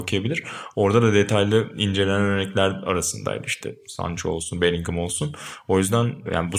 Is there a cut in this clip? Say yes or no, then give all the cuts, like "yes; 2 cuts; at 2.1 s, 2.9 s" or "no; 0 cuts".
no; 0 cuts